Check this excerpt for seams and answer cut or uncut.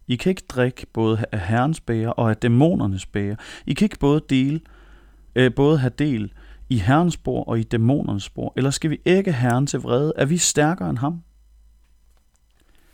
uncut